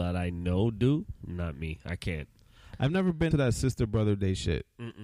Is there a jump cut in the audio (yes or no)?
yes